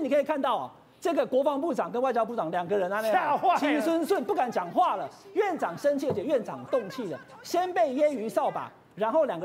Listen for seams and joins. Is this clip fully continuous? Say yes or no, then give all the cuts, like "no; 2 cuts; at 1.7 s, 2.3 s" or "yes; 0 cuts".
yes; 0 cuts